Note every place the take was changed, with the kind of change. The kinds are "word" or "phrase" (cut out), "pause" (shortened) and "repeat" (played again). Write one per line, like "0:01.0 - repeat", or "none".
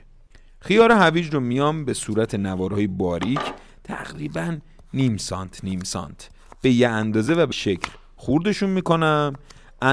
0:07.5 - word